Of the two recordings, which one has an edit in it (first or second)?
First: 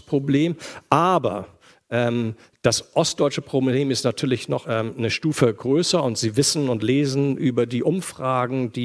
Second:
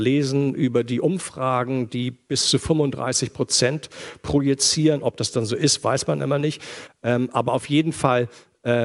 first